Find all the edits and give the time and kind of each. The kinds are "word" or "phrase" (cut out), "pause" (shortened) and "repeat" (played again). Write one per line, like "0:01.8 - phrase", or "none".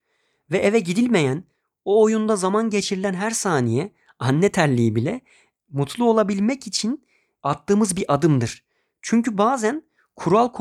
none